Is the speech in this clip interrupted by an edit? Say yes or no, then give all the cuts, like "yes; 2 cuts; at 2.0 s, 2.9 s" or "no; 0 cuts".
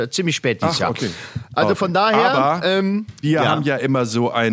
yes; 1 cut; at 3.2 s